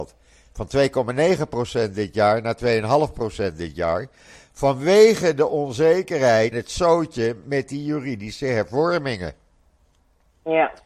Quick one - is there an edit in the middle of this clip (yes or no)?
yes